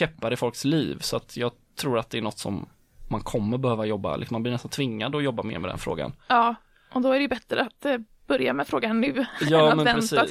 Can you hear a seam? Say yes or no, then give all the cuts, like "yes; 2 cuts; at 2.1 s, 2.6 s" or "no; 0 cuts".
no; 0 cuts